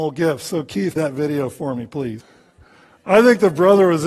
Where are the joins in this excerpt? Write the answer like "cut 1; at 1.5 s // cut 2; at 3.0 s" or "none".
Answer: cut 1; at 1.0 s